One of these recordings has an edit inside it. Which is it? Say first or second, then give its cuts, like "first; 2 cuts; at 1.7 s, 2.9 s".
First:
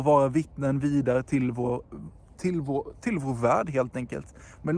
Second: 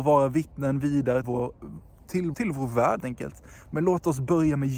second; 3 cuts; at 1.2 s, 2.3 s, 3.0 s